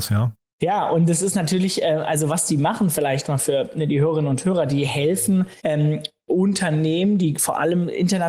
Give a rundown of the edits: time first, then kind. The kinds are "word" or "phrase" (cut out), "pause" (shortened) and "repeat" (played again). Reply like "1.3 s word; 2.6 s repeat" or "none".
5.6 s pause